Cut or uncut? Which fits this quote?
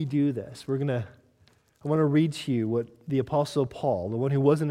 uncut